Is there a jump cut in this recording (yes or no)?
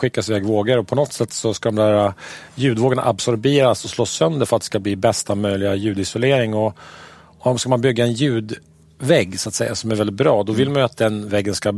no